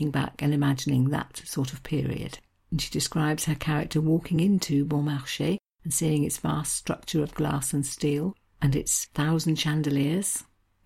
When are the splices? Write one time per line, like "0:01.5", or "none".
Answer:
none